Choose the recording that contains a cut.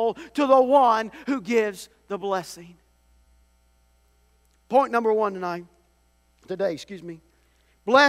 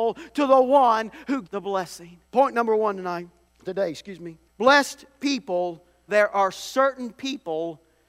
second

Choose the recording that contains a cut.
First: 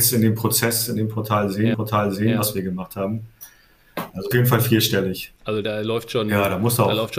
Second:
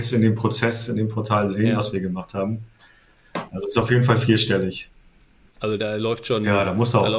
first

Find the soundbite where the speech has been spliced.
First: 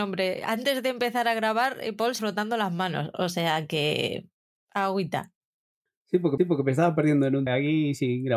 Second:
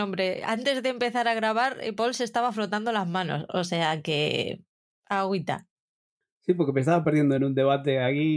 first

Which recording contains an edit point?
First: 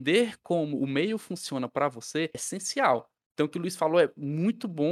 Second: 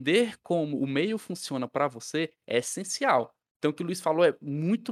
first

